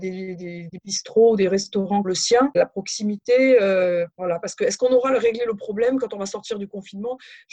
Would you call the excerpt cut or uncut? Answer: cut